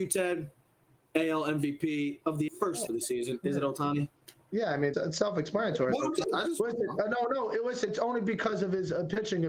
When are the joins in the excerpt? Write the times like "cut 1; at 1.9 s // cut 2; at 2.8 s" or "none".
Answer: cut 1; at 2.5 s // cut 2; at 2.9 s // cut 3; at 4.9 s // cut 4; at 6.2 s // cut 5; at 7.9 s